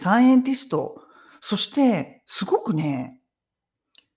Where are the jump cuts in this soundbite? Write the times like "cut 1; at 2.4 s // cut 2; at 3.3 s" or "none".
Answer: none